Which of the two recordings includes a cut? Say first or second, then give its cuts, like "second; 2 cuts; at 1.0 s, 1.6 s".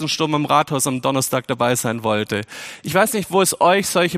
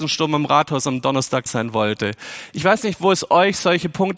second; 1 cut; at 1.5 s